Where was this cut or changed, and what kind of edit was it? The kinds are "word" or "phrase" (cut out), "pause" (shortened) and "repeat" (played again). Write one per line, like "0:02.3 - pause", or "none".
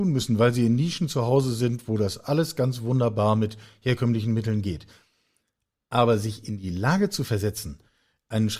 none